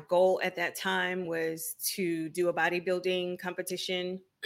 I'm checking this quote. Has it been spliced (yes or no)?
no